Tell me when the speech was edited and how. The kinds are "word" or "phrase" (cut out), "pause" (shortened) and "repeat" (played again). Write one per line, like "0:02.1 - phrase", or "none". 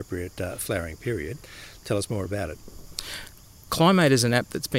none